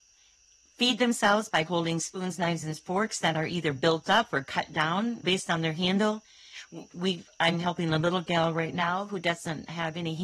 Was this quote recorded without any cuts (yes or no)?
yes